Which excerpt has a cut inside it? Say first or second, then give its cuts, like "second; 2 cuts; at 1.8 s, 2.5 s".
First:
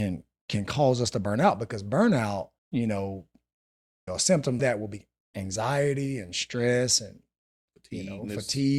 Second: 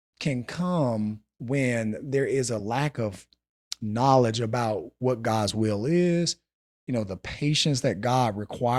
first; 3 cuts; at 2.6 s, 4.1 s, 4.6 s